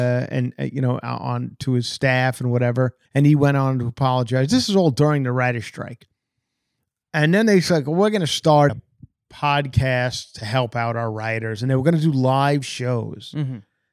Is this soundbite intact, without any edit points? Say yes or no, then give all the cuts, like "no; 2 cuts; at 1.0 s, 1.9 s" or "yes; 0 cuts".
no; 2 cuts; at 3.0 s, 8.7 s